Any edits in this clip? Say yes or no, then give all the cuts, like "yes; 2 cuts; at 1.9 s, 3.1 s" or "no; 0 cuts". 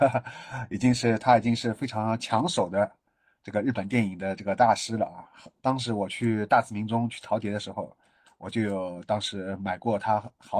no; 0 cuts